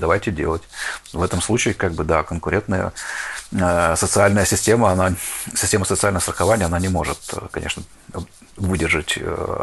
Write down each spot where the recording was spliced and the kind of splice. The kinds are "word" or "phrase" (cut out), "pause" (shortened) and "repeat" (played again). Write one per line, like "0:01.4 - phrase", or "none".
none